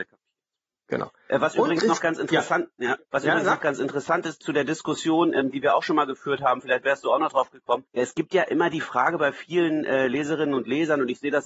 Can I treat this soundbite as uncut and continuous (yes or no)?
no